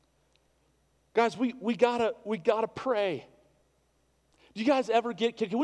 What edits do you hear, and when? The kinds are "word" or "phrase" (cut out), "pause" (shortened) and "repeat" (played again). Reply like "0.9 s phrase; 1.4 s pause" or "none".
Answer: none